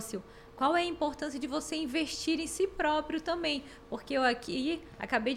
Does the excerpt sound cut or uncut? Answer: uncut